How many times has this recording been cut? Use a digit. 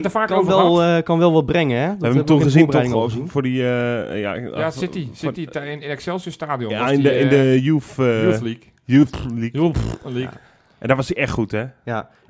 0